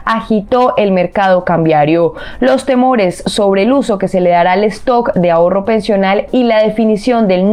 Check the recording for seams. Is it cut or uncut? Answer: uncut